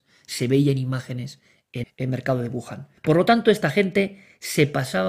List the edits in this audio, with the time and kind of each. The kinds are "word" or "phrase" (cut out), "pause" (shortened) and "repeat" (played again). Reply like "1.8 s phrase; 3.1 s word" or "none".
1.8 s word; 3.0 s pause